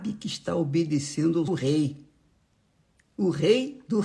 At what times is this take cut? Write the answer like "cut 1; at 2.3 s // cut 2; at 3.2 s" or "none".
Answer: cut 1; at 1.5 s